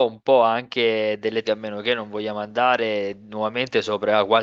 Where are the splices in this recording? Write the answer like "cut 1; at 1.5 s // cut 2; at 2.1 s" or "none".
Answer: cut 1; at 1.4 s